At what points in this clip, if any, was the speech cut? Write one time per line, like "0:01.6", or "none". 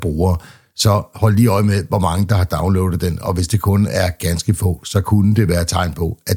none